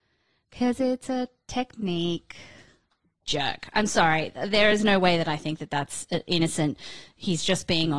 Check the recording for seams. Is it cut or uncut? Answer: uncut